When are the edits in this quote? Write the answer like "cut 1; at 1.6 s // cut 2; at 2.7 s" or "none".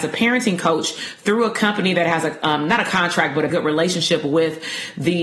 cut 1; at 3.5 s